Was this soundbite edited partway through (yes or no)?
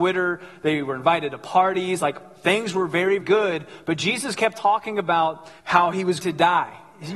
yes